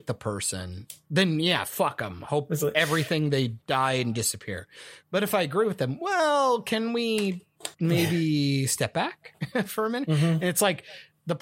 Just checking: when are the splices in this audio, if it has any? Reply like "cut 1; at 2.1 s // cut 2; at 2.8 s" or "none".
cut 1; at 3.6 s // cut 2; at 7.7 s